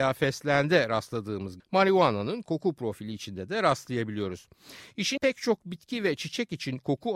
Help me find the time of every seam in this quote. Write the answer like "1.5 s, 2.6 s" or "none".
1.6 s, 5.2 s